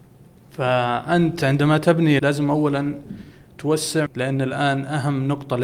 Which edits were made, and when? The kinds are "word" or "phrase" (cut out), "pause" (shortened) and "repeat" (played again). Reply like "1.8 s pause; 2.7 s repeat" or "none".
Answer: 2.2 s word; 4.1 s word